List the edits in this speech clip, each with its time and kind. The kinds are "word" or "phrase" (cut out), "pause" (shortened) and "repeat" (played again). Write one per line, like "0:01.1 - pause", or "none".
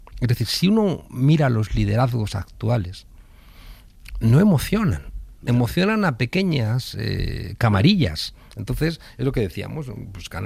0:05.4 - pause